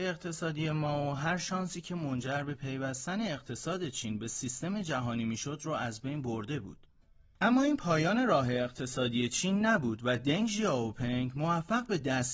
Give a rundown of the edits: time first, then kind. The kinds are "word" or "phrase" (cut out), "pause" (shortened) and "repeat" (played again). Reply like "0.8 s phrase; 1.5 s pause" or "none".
none